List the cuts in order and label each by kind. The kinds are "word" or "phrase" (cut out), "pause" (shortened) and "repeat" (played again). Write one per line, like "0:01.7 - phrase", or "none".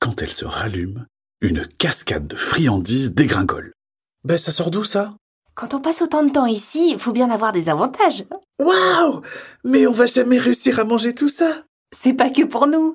none